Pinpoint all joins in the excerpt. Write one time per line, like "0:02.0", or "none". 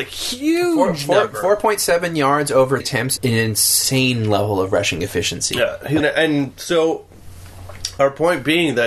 0:02.8
0:03.2
0:06.0